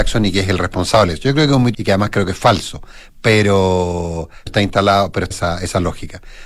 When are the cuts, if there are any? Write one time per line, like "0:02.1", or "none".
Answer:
0:01.7
0:04.5
0:05.3